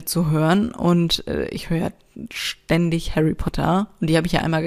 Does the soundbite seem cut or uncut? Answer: uncut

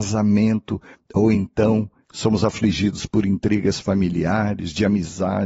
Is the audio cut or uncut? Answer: uncut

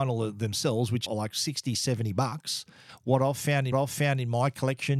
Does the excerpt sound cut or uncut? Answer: cut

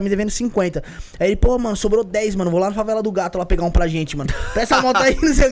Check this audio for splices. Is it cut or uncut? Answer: uncut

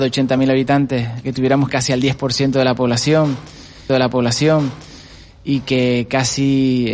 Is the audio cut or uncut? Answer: cut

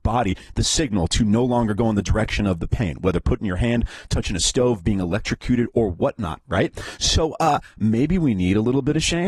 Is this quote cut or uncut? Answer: uncut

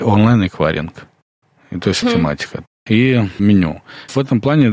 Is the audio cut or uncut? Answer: cut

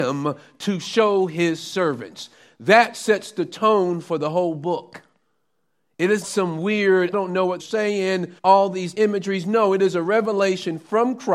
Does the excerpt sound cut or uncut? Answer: cut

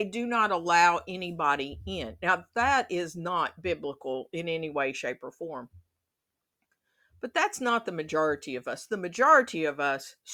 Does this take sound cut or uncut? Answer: uncut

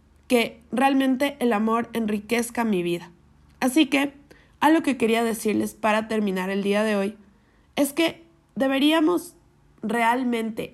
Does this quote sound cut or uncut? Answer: uncut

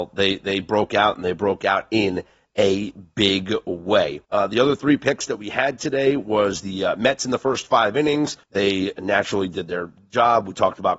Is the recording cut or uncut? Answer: cut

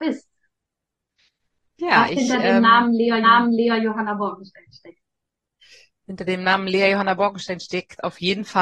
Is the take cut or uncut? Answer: cut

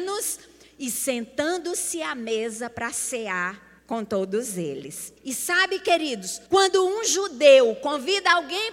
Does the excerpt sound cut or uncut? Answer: cut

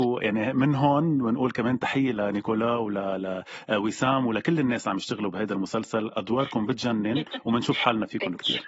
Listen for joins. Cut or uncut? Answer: uncut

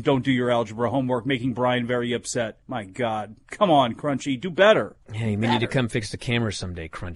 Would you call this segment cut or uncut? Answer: cut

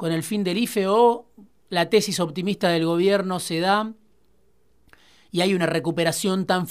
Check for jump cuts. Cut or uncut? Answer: uncut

